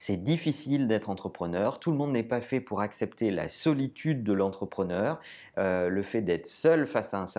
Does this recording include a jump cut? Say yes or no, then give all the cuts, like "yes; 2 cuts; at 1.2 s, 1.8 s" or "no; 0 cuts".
no; 0 cuts